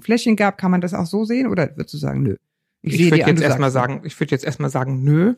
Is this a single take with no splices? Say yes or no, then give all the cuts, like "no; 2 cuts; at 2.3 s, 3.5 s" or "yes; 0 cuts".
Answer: yes; 0 cuts